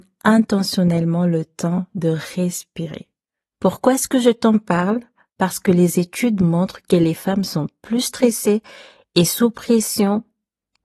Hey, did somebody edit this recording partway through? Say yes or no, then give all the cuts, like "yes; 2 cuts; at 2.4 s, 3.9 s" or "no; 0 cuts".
no; 0 cuts